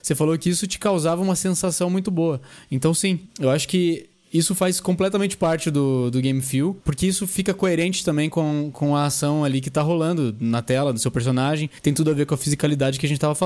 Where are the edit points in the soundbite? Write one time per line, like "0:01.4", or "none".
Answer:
0:11.8